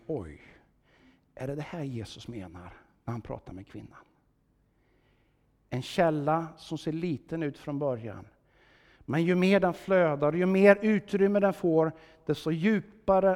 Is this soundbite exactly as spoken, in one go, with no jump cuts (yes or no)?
yes